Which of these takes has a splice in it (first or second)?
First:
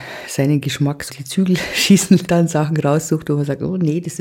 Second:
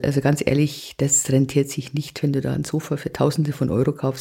first